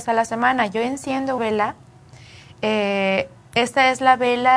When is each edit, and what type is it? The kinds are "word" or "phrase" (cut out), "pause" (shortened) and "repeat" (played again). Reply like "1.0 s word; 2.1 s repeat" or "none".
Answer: 1.4 s word